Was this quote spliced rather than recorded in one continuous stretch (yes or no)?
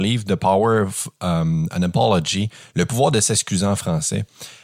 no